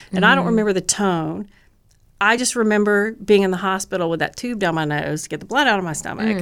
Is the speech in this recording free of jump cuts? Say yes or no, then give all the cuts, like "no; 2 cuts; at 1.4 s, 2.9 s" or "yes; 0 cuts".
yes; 0 cuts